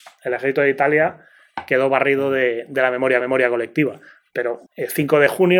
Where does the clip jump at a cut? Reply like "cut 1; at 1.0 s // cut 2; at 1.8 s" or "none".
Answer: cut 1; at 3.2 s // cut 2; at 4.7 s